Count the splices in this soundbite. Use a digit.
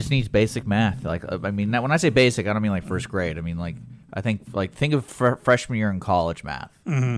1